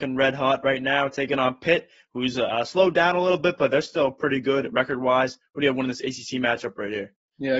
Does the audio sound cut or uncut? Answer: uncut